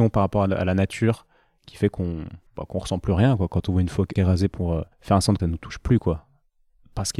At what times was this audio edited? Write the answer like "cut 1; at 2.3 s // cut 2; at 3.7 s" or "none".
cut 1; at 2.5 s // cut 2; at 4.2 s // cut 3; at 4.9 s // cut 4; at 5.4 s